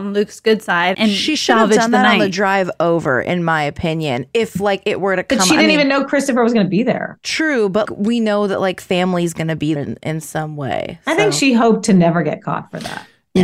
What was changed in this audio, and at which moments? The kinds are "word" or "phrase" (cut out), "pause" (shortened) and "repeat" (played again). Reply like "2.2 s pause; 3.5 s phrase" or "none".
0.9 s word; 7.9 s word; 9.8 s word